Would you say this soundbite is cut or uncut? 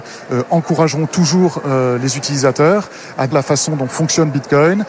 cut